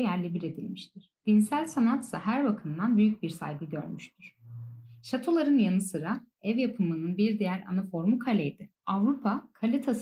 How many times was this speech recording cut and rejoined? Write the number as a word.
two